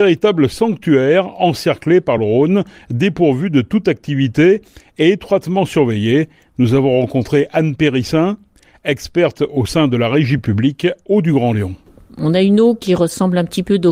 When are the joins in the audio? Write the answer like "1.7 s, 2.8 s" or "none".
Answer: none